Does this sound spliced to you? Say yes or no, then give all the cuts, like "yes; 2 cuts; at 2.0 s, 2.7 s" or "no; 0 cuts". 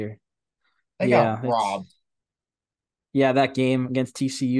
no; 0 cuts